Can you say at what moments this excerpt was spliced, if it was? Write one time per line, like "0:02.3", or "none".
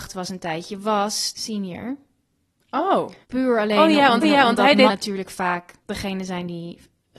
0:01.3
0:03.2
0:04.2
0:04.9
0:05.8